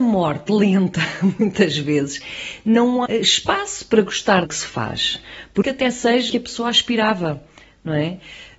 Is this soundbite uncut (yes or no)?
no